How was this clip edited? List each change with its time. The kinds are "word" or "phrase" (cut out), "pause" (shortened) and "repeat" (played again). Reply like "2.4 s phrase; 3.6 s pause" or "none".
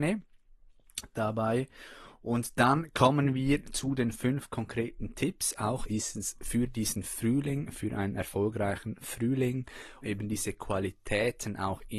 5.9 s word; 10.0 s word